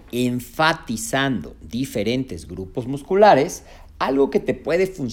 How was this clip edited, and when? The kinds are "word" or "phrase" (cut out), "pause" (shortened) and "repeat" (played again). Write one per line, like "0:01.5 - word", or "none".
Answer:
none